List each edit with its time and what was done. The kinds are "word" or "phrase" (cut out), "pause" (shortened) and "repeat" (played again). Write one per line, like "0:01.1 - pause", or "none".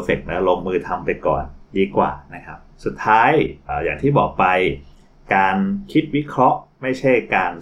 0:02.7 - pause